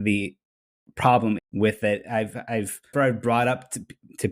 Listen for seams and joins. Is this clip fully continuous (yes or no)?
no